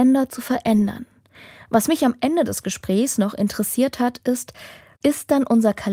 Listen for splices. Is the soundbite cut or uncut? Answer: uncut